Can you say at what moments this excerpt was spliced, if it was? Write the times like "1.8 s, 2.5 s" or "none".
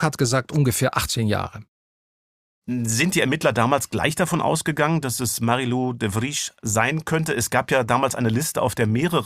none